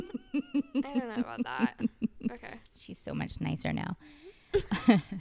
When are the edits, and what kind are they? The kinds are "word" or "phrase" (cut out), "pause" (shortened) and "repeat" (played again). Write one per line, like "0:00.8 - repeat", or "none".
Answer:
0:02.7 - pause